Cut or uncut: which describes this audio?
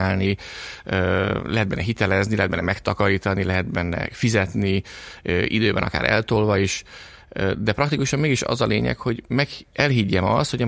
uncut